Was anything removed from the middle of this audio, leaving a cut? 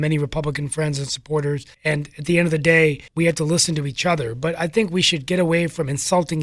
yes; 2 cuts; at 1.7 s, 3.1 s

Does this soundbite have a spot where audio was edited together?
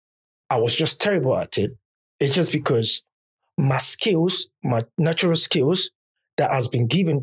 no; 0 cuts

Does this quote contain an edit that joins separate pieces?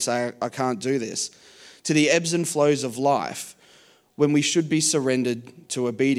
no; 0 cuts

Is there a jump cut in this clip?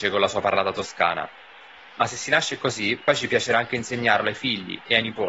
no; 0 cuts

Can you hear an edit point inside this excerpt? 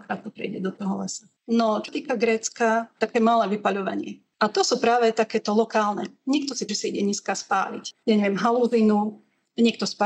yes; 5 cuts; at 1.4 s, 1.9 s, 3.1 s, 4.3 s, 6.7 s

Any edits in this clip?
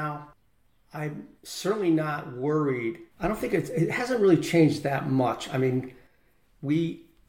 yes; 2 cuts; at 1.4 s, 3.1 s

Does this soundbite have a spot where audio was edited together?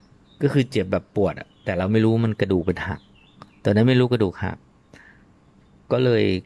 no; 0 cuts

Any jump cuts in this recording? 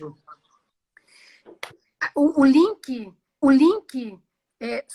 yes; 1 cut; at 3.4 s

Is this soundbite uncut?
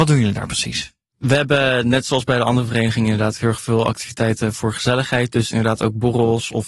yes; 0 cuts

